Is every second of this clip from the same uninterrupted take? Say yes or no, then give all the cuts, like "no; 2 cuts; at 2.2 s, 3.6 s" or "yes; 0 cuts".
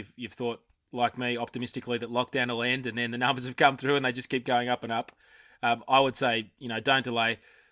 yes; 0 cuts